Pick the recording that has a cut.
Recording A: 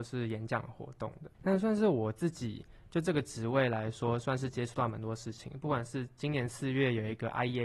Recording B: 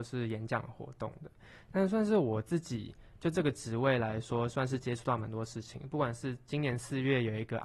A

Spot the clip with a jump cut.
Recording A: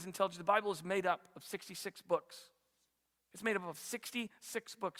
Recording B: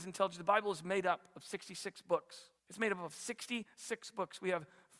B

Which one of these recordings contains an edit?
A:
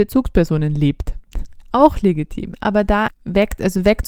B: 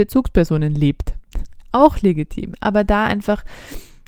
A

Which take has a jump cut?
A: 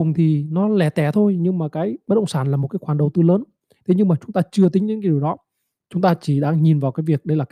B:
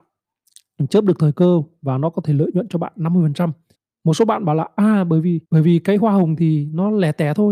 B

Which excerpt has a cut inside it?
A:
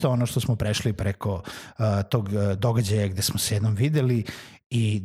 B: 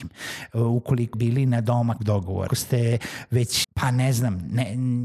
B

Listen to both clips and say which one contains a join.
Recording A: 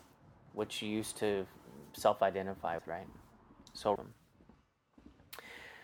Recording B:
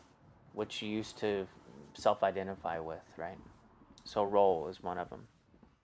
A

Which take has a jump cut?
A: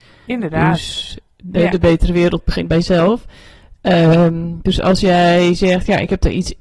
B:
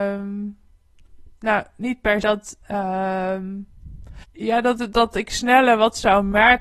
B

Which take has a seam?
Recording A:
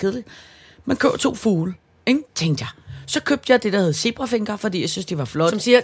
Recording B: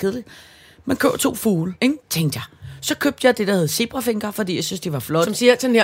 B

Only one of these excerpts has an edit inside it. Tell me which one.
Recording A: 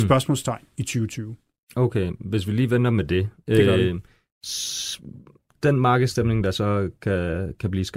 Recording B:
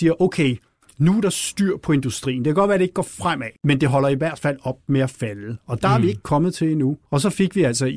B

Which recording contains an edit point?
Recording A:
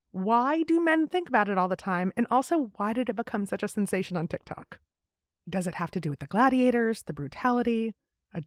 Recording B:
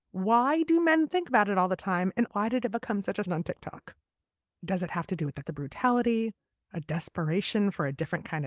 B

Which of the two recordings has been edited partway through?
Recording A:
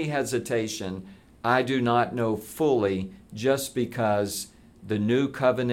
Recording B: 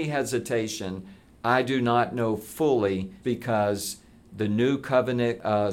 B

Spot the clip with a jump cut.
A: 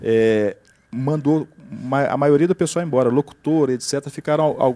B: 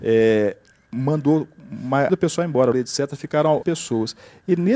B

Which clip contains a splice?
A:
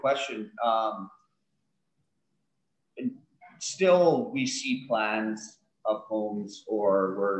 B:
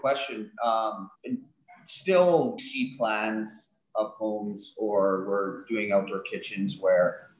B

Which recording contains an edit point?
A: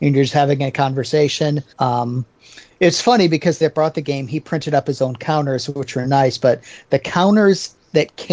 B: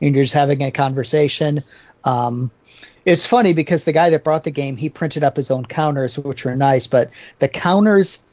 A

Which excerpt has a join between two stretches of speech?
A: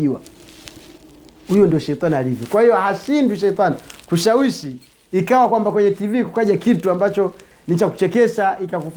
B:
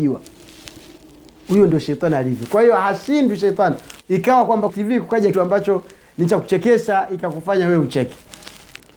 B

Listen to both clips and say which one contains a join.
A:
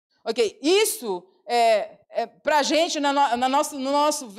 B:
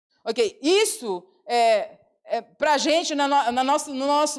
A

